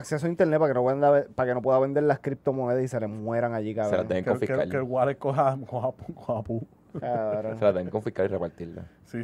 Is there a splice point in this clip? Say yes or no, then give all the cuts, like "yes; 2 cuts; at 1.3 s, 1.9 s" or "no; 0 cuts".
no; 0 cuts